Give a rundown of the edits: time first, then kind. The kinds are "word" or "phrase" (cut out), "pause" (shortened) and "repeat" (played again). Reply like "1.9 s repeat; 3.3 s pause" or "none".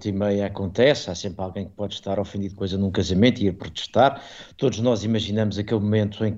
2.6 s word

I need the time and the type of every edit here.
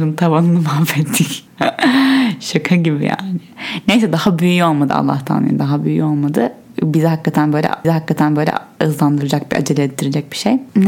7.8 s repeat

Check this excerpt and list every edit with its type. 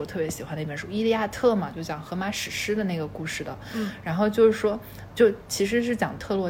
5.1 s word

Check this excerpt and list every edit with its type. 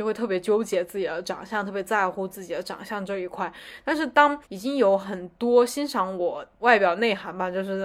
4.4 s pause; 6.6 s word

